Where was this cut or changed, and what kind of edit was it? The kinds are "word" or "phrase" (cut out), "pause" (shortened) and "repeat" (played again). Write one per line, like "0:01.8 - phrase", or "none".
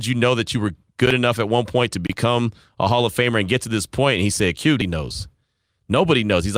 0:04.8 - word